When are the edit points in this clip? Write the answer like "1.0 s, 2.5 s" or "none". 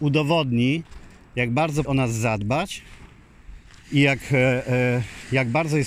1.8 s